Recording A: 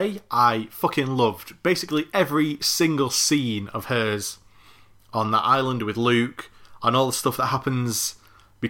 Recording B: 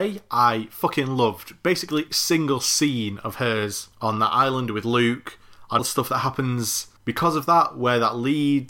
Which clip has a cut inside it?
B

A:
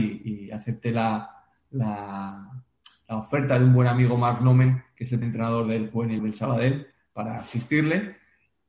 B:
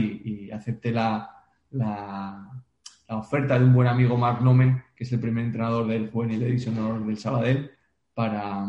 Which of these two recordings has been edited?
A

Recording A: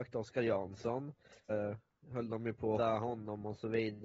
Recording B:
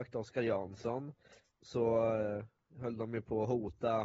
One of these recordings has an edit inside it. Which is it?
A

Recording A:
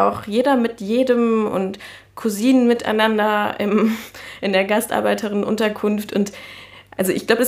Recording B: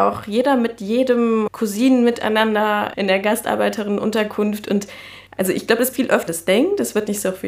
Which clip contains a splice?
B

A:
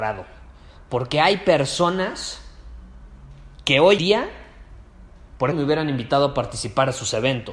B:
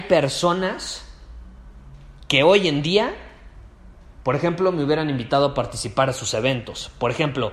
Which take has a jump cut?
A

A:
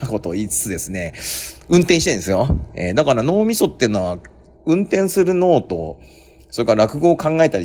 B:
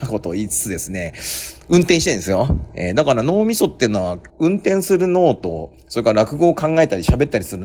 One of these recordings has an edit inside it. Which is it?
B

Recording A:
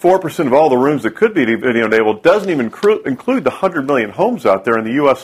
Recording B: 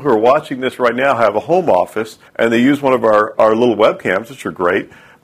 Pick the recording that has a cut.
B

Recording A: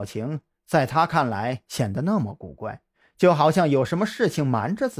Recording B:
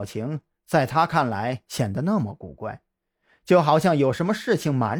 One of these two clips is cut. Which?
A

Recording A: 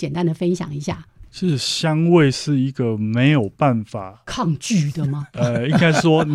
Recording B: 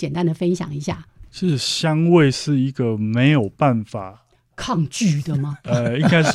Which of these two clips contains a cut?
A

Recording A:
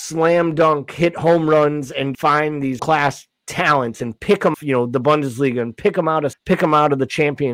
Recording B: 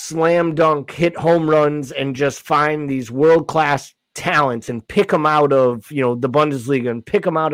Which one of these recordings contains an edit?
A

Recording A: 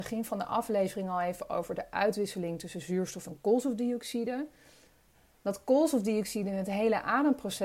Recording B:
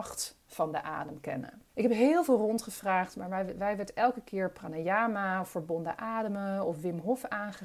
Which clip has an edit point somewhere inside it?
B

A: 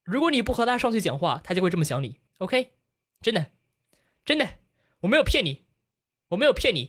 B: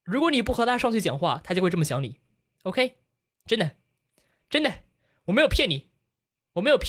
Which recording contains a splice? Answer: A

